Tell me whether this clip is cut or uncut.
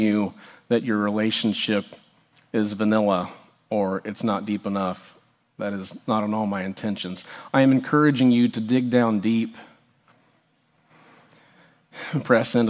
uncut